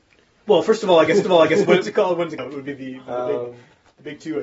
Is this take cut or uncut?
cut